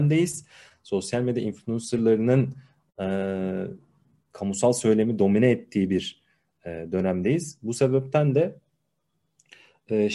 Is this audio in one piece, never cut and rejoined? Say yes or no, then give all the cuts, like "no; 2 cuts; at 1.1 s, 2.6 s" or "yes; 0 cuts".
yes; 0 cuts